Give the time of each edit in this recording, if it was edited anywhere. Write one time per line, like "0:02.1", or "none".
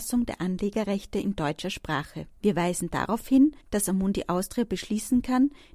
0:02.4
0:03.6

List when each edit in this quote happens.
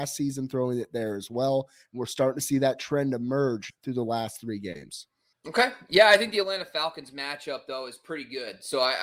0:03.7
0:05.3

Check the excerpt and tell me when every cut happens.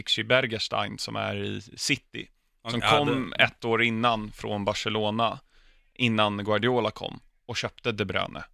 none

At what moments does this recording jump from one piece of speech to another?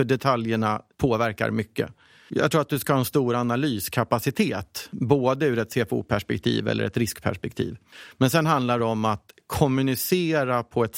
none

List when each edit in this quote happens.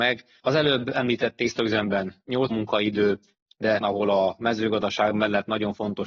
0:02.5
0:03.8

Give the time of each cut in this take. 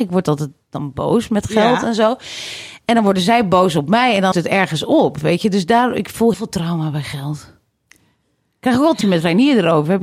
0:04.3
0:06.3
0:09.0

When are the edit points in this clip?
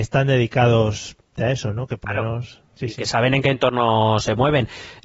0:01.4
0:02.0
0:02.7

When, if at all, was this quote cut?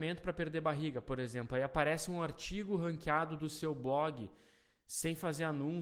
none

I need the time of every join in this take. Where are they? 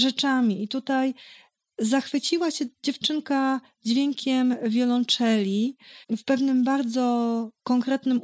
0:06.0

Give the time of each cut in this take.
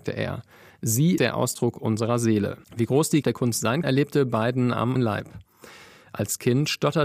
0:01.2
0:02.6
0:03.2
0:03.8
0:05.0

